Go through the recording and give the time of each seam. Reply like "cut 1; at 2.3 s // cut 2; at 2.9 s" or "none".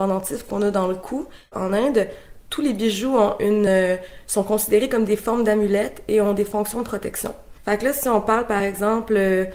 none